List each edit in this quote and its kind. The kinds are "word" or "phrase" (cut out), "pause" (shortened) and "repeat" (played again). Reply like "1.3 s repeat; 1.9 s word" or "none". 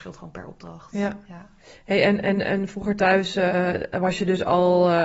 none